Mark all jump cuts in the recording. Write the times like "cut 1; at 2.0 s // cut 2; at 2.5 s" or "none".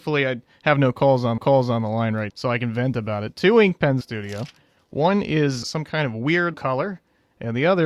cut 1; at 1.4 s // cut 2; at 2.3 s // cut 3; at 4.0 s // cut 4; at 5.6 s // cut 5; at 6.5 s